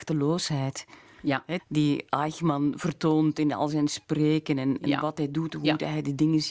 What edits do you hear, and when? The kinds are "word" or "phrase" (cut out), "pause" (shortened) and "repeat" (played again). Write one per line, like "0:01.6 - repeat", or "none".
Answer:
0:01.6 - word